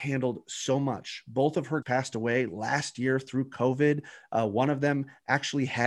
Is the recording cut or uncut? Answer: cut